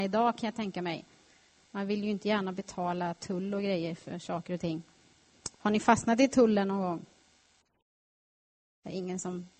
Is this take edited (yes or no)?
yes